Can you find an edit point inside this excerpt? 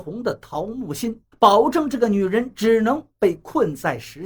yes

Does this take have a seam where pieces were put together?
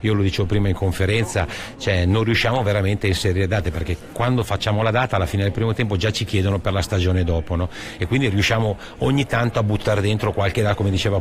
no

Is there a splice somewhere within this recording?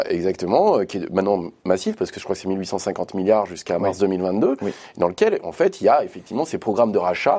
no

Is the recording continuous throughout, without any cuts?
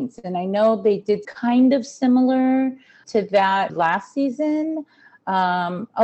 no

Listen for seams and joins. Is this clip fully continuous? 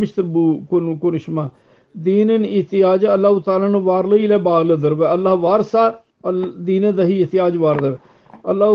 no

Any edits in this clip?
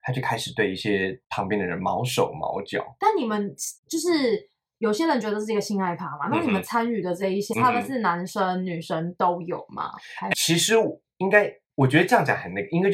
yes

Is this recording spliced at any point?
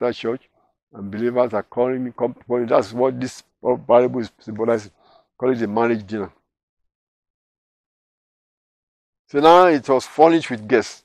no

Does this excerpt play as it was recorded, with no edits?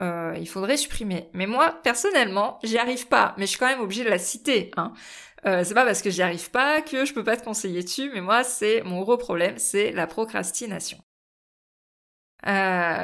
yes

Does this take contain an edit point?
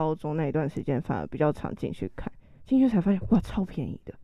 no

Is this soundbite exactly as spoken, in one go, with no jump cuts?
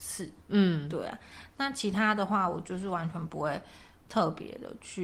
yes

